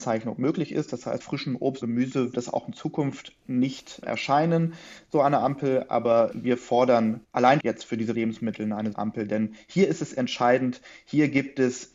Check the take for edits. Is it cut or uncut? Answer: cut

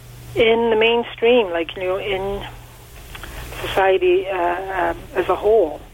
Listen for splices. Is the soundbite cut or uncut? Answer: uncut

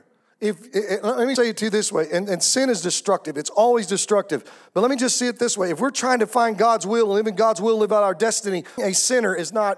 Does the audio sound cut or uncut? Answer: cut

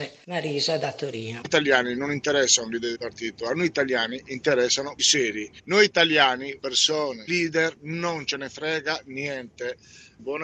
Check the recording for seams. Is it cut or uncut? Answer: cut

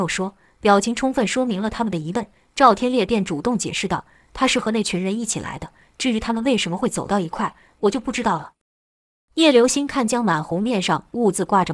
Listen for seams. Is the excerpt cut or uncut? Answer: uncut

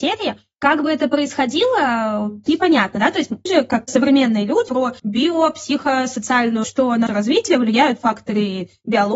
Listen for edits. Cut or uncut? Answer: cut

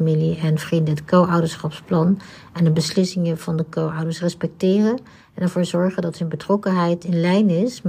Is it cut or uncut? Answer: uncut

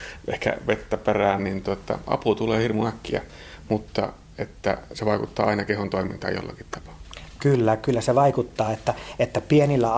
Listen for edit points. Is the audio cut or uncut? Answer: uncut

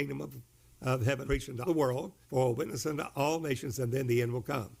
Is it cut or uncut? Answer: cut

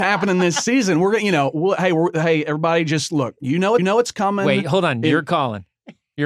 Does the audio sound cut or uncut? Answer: cut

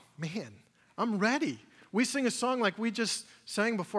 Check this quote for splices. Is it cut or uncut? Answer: uncut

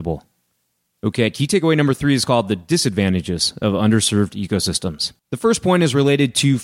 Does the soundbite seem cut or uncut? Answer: cut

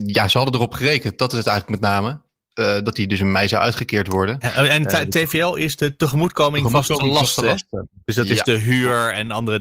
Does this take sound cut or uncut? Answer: uncut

